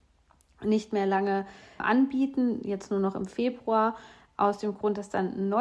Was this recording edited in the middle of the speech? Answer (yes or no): yes